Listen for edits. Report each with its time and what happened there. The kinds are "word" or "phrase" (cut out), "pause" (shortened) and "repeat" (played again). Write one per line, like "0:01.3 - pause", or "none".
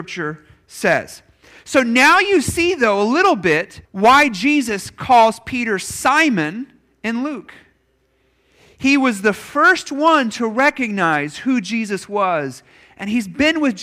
0:03.8 - pause